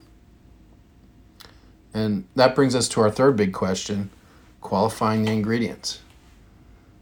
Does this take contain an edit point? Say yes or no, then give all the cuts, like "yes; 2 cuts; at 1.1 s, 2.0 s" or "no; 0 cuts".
no; 0 cuts